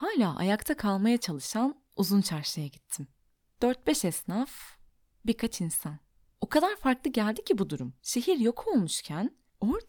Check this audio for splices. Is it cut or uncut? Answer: cut